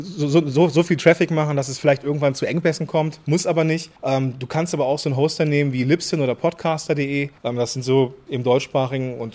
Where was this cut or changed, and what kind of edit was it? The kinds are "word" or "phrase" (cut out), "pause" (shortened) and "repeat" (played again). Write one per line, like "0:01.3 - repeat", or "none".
0:04.0 - pause
0:07.4 - pause